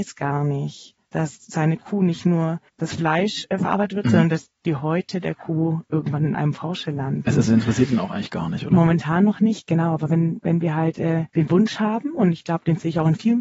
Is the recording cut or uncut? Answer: cut